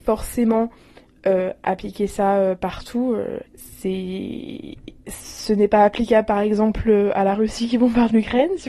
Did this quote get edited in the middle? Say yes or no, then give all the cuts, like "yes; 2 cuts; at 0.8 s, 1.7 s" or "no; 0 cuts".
yes; 1 cut; at 3.5 s